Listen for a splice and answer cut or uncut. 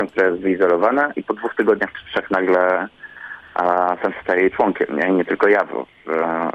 cut